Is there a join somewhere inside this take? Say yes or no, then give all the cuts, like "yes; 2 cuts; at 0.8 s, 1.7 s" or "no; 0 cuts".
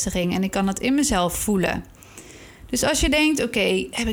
no; 0 cuts